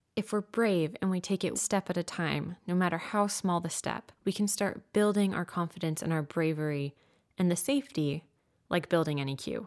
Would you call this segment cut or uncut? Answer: cut